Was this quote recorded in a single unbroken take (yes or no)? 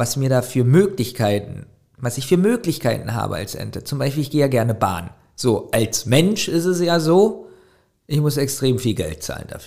yes